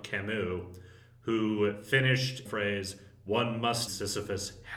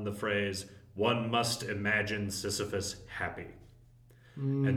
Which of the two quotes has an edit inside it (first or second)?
first